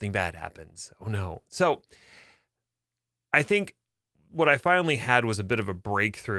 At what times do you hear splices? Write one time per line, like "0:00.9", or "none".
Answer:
none